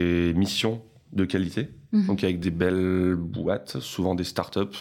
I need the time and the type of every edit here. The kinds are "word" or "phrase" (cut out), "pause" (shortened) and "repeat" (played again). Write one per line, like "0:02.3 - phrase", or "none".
none